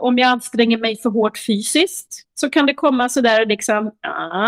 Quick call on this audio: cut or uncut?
cut